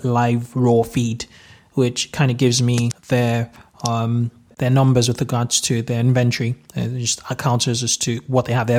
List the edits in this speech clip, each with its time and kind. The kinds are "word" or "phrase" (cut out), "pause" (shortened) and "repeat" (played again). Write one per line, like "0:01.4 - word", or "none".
none